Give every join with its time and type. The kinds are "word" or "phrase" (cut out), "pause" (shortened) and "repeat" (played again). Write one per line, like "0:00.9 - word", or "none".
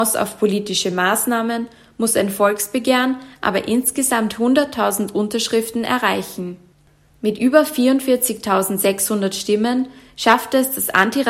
none